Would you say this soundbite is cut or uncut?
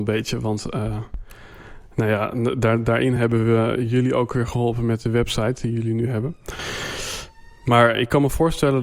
uncut